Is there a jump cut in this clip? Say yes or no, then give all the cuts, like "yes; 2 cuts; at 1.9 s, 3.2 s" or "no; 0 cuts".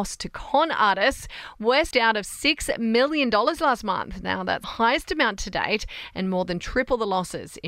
yes; 2 cuts; at 1.9 s, 4.6 s